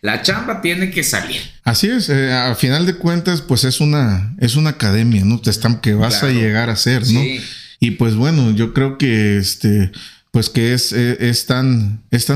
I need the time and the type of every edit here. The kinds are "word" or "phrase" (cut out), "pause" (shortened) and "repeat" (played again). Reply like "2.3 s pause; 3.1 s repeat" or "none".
1.6 s pause; 5.8 s phrase; 7.7 s pause